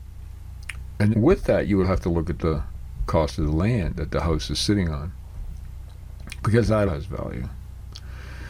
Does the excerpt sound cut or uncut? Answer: cut